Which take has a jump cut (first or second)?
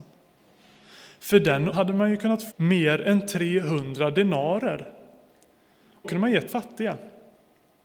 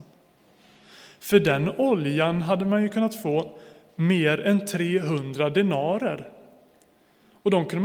first